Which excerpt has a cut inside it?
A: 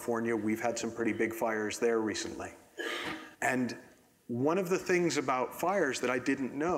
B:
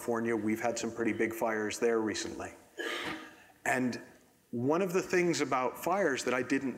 A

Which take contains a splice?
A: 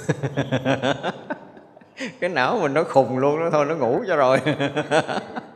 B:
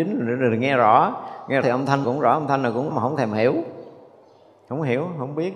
B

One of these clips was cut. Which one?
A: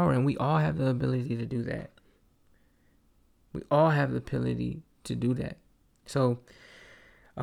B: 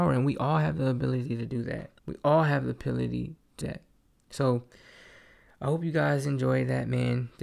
B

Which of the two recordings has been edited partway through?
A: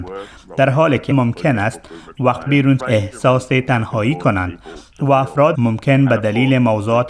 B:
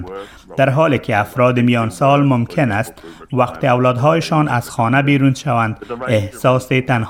A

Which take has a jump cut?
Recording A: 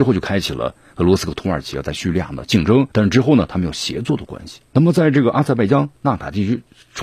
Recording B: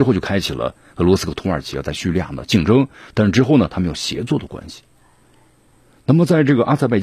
A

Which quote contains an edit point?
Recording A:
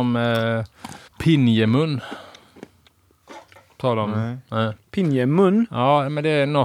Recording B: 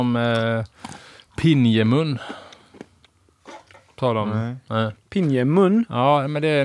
A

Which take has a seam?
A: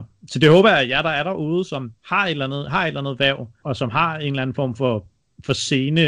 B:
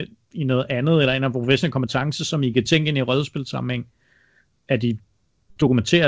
A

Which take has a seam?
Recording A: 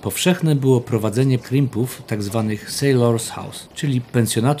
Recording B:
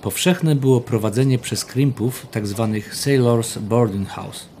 A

